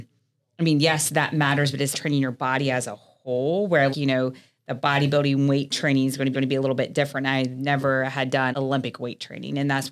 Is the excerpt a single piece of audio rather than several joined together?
no; 4 cuts; at 1.9 s, 3.9 s, 6.3 s, 8.5 s

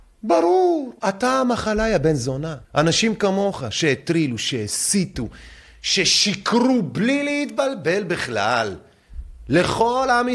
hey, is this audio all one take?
no; 2 cuts; at 1.0 s, 2.6 s

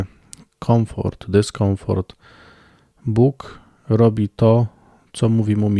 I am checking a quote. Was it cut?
no; 0 cuts

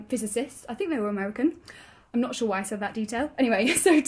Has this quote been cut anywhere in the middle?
no; 0 cuts

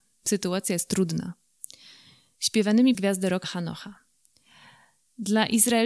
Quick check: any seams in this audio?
yes; 2 cuts; at 2.9 s, 3.4 s

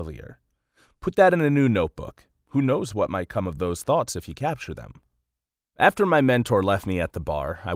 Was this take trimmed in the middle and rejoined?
no; 0 cuts

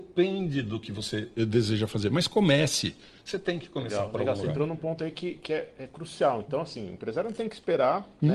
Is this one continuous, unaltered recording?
yes; 0 cuts

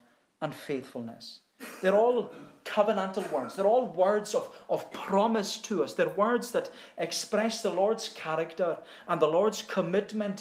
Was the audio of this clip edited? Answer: no; 0 cuts

